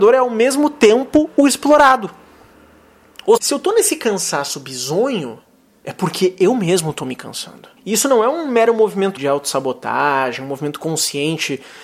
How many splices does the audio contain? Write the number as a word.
three